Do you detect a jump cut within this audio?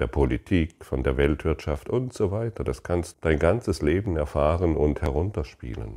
yes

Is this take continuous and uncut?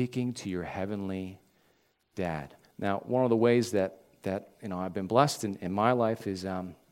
no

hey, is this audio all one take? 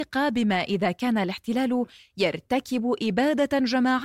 yes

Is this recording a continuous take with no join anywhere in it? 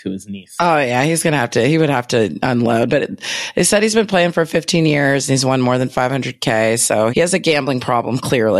no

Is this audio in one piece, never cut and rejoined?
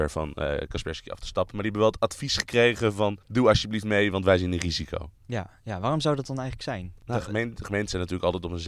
no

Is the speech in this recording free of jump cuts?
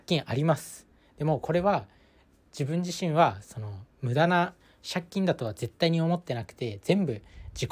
yes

